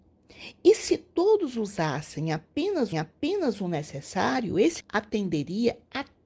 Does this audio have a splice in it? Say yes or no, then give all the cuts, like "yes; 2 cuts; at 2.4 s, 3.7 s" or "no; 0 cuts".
yes; 2 cuts; at 2.9 s, 4.8 s